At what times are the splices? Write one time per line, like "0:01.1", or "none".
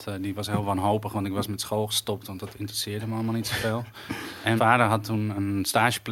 0:04.6